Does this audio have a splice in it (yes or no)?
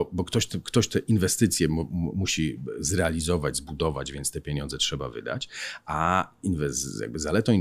no